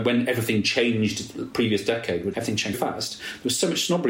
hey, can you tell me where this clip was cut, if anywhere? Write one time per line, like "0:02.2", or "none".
0:02.3
0:02.7